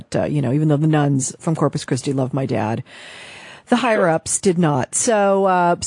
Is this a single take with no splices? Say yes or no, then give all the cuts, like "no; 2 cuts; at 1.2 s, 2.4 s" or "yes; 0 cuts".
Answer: yes; 0 cuts